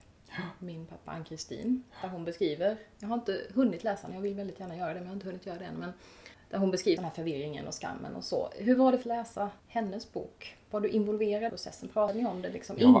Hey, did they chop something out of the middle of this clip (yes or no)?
yes